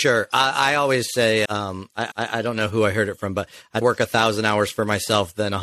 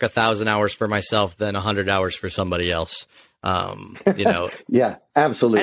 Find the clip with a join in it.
first; 3 cuts; at 1.4 s, 2.1 s, 3.8 s

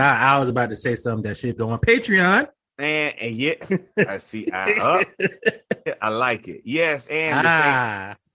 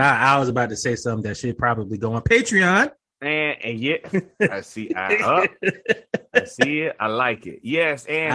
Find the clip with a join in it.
first; 2 cuts; at 1.6 s, 5.9 s

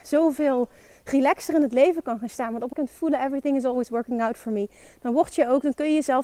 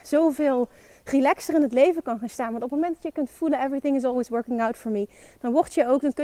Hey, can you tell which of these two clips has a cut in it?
first; 1 cut; at 2.7 s

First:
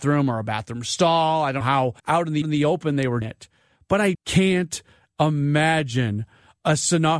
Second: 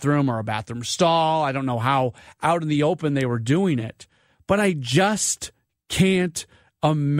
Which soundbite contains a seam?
first; 5 cuts; at 1.6 s, 2.0 s, 2.4 s, 3.2 s, 4.1 s

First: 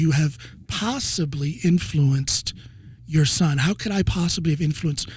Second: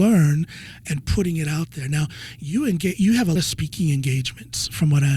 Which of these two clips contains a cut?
second; 1 cut; at 3.4 s

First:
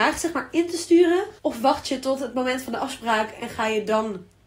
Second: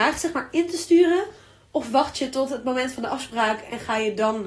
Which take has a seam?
first; 1 cut; at 1.4 s

